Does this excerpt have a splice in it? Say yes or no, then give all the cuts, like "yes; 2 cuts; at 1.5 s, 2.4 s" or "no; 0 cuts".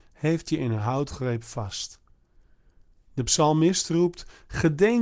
no; 0 cuts